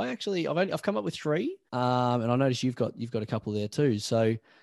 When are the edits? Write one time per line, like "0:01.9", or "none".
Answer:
0:01.7